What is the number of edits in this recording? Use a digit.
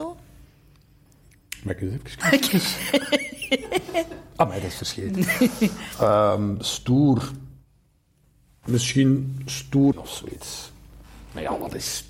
2